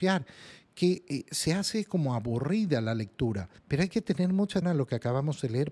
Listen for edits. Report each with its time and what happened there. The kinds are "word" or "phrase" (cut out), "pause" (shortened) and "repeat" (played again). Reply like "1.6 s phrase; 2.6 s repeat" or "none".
3.6 s pause; 4.6 s word